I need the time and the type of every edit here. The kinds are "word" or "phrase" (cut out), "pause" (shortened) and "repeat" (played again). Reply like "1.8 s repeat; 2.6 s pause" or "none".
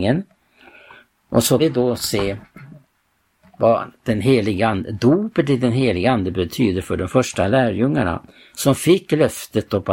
1.6 s word